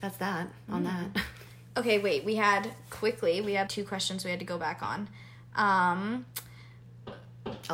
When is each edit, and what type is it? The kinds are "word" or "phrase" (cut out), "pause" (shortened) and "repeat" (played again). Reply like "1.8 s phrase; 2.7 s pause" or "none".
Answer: 3.7 s word